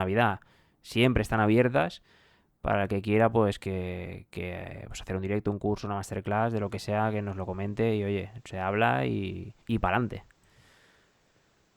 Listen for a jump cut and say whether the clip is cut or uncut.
cut